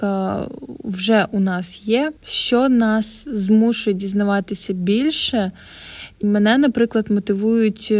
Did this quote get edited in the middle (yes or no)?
yes